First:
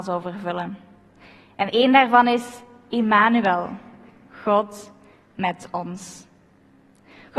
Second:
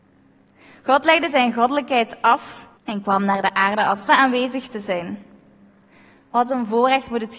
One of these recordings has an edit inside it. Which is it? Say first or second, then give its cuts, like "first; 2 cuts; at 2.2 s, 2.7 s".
second; 2 cuts; at 2.8 s, 4.1 s